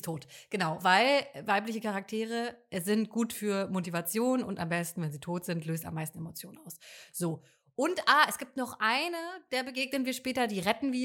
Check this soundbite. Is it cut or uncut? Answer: uncut